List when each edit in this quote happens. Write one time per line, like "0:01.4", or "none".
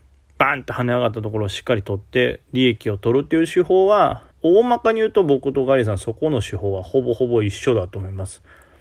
0:02.4
0:04.3